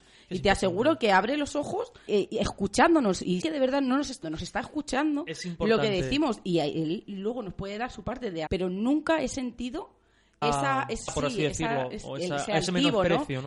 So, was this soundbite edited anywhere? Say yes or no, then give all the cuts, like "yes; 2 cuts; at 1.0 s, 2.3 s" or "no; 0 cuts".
yes; 6 cuts; at 2.1 s, 3.4 s, 4.2 s, 8.5 s, 10.4 s, 11.1 s